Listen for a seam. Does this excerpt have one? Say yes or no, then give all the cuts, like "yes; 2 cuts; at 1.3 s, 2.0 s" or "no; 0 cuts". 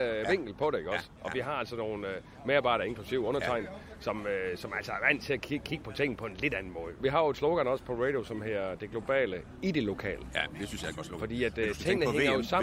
no; 0 cuts